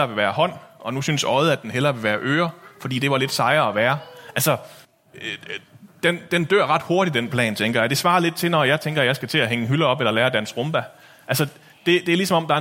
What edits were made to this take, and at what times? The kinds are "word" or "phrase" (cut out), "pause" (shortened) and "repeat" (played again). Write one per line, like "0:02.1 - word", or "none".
0:04.8 - pause